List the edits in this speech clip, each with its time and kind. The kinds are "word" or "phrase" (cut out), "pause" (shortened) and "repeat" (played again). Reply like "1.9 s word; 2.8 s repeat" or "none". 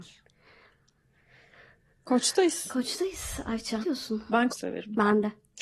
3.8 s word; 4.5 s phrase